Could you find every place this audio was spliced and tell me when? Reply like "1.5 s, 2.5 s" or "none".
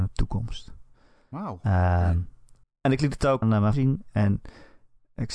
2.6 s, 3.4 s, 3.7 s